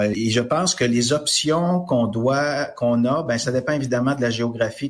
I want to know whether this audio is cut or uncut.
uncut